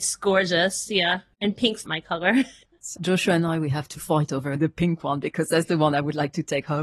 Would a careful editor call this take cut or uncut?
cut